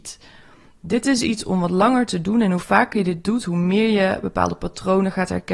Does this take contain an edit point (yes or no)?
no